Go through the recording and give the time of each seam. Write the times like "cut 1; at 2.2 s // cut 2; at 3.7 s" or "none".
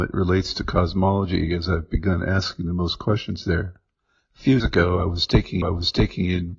cut 1; at 4.6 s // cut 2; at 5.6 s